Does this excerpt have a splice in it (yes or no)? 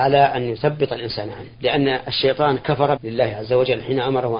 yes